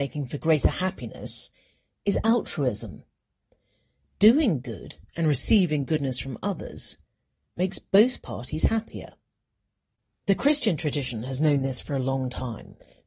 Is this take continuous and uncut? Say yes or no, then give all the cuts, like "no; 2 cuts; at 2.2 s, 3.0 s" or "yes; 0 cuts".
yes; 0 cuts